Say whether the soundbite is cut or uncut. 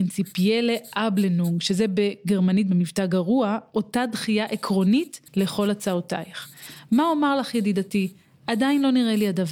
cut